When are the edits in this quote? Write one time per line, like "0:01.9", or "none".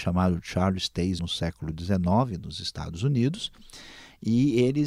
0:01.2